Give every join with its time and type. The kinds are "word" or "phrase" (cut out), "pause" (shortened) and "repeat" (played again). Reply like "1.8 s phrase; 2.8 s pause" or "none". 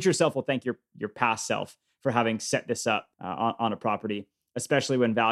3.1 s pause

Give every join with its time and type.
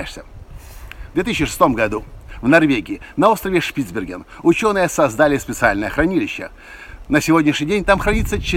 none

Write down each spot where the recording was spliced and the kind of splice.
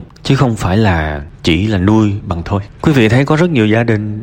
2.4 s word

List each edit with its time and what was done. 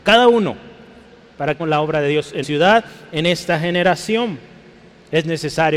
1.6 s word; 2.4 s word

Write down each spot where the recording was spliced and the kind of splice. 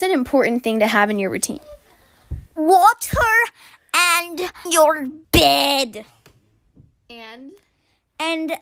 2.5 s pause; 4.7 s word; 5.2 s pause

